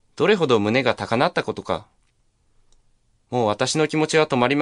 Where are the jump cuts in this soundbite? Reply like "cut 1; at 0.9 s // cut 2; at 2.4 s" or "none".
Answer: none